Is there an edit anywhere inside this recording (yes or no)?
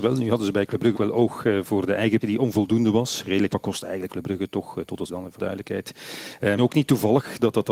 yes